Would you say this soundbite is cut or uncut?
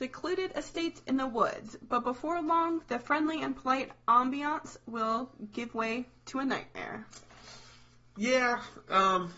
uncut